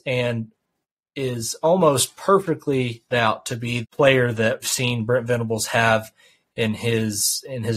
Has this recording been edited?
yes; 3 cuts; at 3.1 s, 3.8 s, 4.6 s

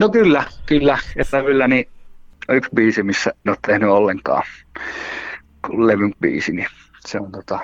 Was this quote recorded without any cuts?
no; 4 cuts; at 1.3 s, 2.5 s, 3.5 s, 6.1 s

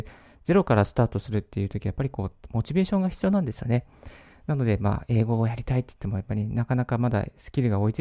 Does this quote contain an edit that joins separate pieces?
no; 0 cuts

